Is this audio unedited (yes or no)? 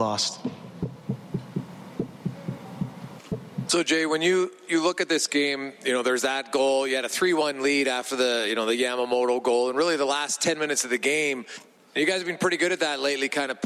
yes